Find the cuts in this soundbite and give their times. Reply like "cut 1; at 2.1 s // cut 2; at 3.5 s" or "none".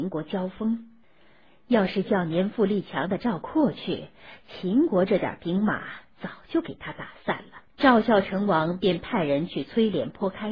cut 1; at 7.7 s